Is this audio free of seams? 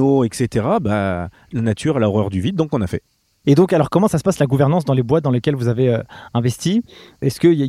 yes; 0 cuts

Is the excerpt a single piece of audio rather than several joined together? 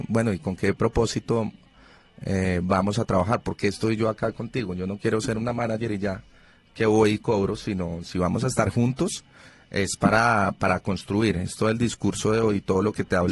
yes; 0 cuts

